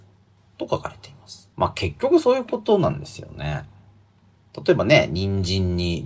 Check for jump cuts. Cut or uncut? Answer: cut